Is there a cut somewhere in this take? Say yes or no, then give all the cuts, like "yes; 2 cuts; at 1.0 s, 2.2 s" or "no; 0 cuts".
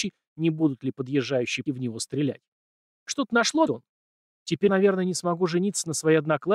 yes; 4 cuts; at 1.7 s, 2.7 s, 3.7 s, 4.7 s